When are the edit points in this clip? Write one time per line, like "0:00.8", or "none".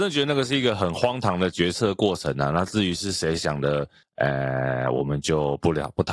none